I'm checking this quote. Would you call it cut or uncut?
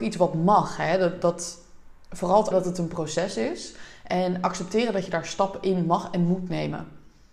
cut